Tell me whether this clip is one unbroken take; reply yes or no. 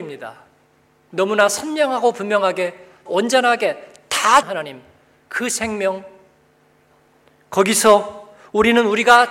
no